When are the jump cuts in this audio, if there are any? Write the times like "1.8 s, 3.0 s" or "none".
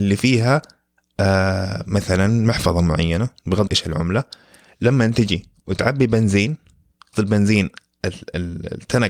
3.7 s, 7.1 s